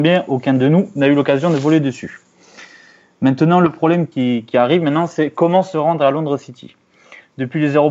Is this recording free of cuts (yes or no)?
yes